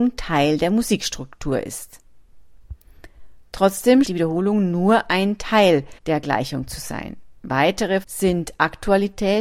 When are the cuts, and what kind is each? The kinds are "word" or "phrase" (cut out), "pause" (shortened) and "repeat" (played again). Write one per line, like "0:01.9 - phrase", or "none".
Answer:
0:04.0 - word
0:06.0 - pause
0:08.0 - phrase